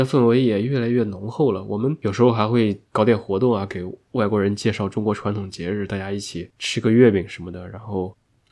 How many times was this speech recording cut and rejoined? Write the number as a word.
one